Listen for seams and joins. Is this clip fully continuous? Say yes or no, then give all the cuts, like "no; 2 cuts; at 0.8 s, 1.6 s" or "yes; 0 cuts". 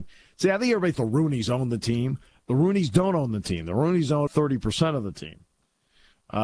no; 2 cuts; at 0.9 s, 4.3 s